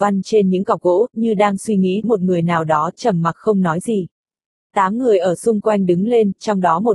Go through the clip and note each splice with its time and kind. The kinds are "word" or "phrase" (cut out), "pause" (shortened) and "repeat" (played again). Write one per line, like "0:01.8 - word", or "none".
0:02.0 - word